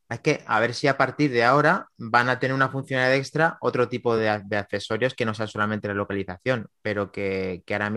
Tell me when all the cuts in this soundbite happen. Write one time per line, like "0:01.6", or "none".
none